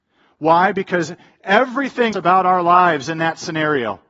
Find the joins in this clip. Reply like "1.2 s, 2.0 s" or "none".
2.1 s